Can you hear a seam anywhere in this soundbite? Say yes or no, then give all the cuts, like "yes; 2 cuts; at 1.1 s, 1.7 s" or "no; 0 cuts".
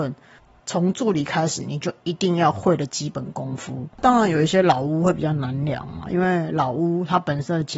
yes; 1 cut; at 3.9 s